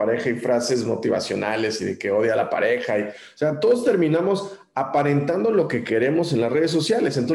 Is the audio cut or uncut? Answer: uncut